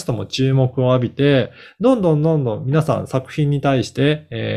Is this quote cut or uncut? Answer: uncut